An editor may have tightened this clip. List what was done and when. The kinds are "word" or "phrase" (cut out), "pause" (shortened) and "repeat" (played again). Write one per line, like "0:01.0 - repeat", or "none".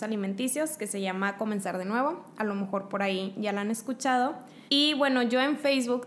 0:04.7 - pause